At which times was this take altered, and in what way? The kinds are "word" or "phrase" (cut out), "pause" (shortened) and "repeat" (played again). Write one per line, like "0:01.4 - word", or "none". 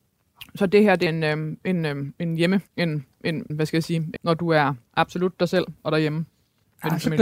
0:01.1 - word
0:02.7 - pause
0:03.5 - word
0:04.2 - word
0:04.9 - pause